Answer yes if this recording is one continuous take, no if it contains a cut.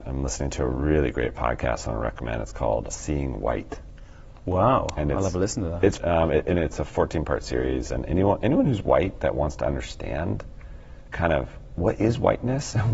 no